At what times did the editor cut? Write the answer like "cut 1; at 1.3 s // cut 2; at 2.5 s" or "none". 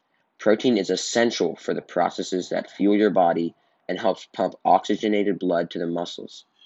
none